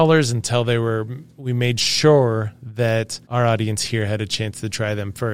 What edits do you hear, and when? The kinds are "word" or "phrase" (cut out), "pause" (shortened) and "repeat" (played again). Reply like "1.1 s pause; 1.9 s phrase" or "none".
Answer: 3.2 s pause